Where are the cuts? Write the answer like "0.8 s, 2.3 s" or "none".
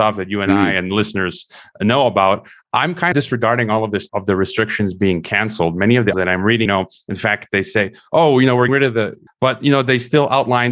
3.1 s, 4.1 s, 6.1 s, 6.7 s, 8.7 s, 9.3 s